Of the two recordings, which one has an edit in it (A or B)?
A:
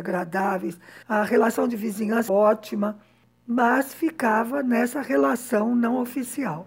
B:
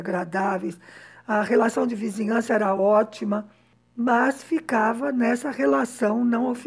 A